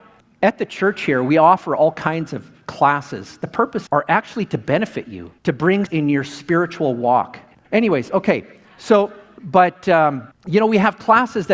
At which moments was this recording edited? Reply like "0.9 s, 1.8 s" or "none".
3.9 s, 5.4 s, 5.9 s, 7.5 s